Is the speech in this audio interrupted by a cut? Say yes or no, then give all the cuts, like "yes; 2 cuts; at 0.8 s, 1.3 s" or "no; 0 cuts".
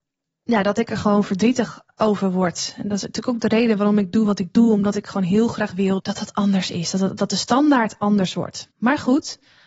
yes; 1 cut; at 8.7 s